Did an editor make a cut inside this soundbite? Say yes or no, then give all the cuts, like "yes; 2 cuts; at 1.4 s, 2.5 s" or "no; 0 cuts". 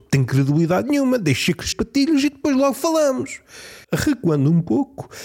yes; 2 cuts; at 1.7 s, 3.8 s